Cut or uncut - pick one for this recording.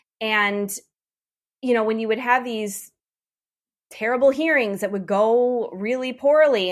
uncut